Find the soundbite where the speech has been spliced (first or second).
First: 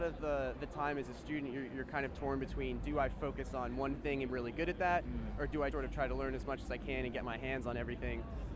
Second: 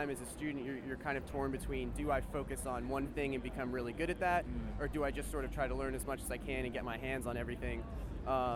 first